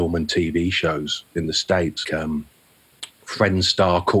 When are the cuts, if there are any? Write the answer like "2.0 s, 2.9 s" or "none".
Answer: 2.0 s